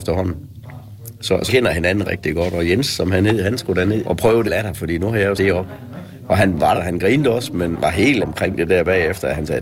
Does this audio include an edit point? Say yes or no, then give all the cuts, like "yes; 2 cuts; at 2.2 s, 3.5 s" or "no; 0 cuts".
yes; 8 cuts; at 1.5 s, 2.0 s, 4.0 s, 4.5 s, 5.4 s, 6.7 s, 7.7 s, 8.2 s